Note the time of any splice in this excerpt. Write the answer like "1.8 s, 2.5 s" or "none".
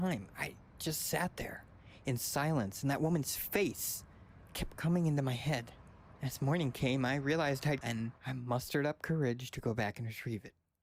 7.8 s, 8.2 s